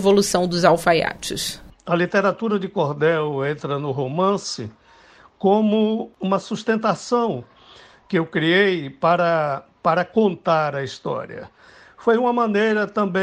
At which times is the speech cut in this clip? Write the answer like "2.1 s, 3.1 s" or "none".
none